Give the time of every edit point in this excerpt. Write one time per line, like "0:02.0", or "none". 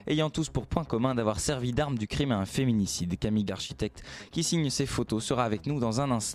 0:03.5

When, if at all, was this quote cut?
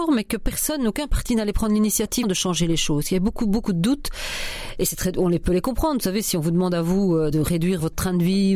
0:02.2

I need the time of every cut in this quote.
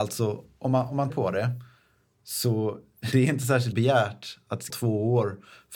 0:01.1
0:03.1
0:03.7
0:04.7

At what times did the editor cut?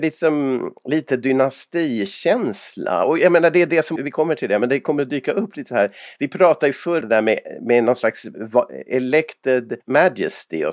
0:04.0
0:07.0
0:09.8

